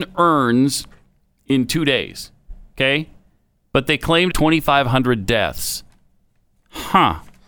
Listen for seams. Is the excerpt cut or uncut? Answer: cut